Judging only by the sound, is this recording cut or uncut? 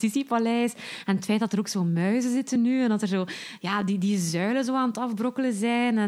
uncut